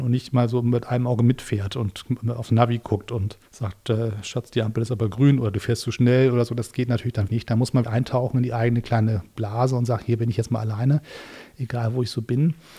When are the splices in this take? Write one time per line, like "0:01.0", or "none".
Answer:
0:03.5
0:07.3
0:07.8